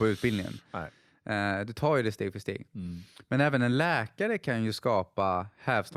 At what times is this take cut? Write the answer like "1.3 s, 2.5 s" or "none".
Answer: none